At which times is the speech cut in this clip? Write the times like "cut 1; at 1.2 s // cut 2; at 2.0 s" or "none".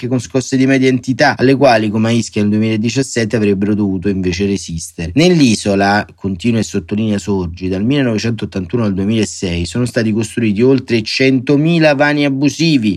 none